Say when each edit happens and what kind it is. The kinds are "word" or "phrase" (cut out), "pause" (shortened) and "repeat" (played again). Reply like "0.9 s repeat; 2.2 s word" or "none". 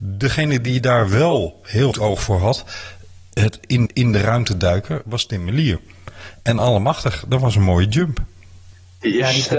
1.9 s word; 3.9 s repeat